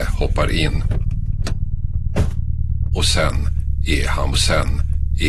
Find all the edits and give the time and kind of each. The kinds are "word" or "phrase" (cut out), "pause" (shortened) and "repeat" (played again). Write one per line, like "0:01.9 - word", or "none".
0:04.3 - repeat